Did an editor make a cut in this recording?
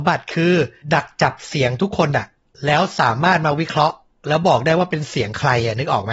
no; 0 cuts

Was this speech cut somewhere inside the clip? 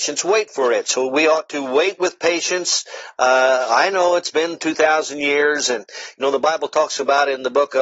no; 0 cuts

